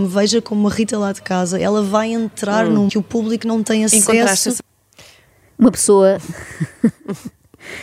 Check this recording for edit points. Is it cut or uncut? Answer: cut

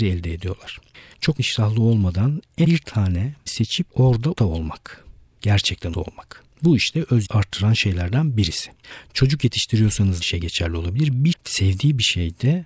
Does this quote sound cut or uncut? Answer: cut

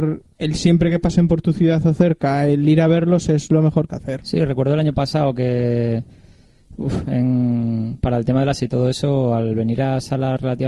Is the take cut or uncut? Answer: cut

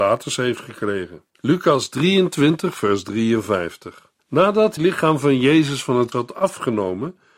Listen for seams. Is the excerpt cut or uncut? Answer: cut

